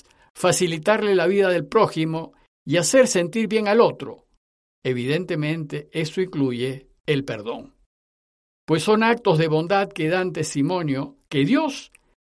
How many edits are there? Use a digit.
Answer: 0